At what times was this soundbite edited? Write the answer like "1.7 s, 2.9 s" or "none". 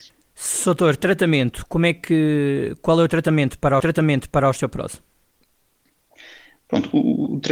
3.8 s

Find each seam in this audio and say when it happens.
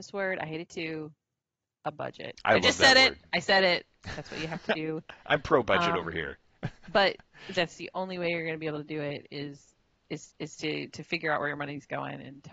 7.5 s, 10.3 s

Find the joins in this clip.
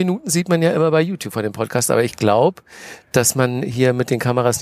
none

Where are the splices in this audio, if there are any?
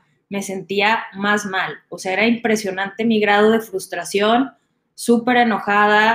none

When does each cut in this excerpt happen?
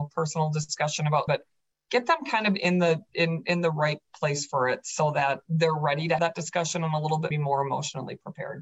1.3 s, 5.5 s, 6.2 s, 7.3 s

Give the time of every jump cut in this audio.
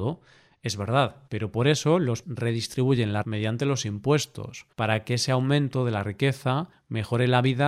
1.3 s, 2.2 s, 3.2 s, 4.7 s

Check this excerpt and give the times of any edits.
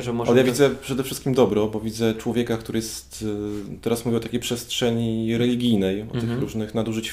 none

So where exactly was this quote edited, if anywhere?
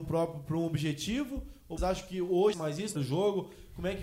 1.8 s, 2.5 s, 3.0 s

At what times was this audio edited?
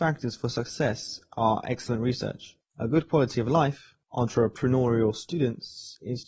2.6 s, 4.0 s

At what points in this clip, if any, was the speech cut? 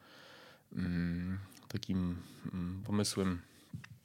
2.8 s

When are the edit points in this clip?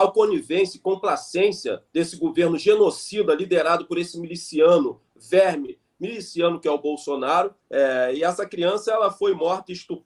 1.9 s, 7.6 s

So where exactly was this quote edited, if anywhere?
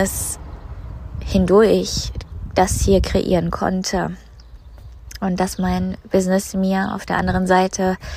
none

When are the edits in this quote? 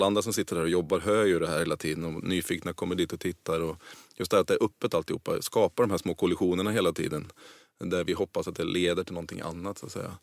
none

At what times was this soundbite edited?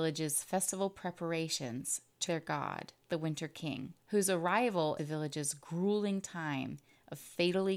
2.3 s, 3.0 s, 4.0 s, 5.0 s

